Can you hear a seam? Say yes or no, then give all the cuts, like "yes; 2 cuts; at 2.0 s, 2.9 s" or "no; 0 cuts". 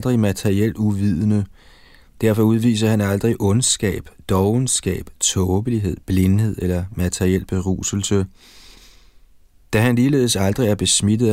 no; 0 cuts